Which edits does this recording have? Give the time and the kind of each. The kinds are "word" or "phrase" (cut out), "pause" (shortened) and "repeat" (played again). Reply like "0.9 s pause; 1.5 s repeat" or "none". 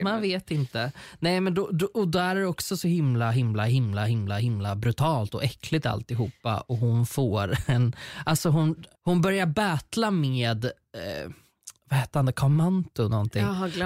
8.9 s pause